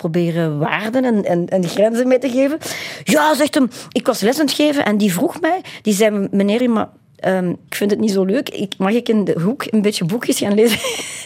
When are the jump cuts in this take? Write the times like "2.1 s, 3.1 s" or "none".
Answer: 3.9 s, 6.6 s, 7.7 s